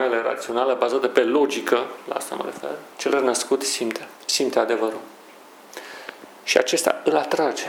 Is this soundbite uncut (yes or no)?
no